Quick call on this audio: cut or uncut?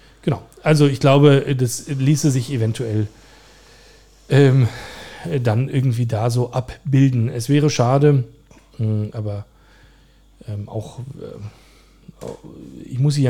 uncut